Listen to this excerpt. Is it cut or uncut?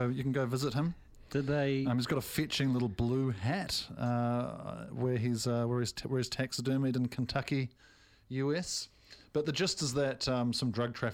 uncut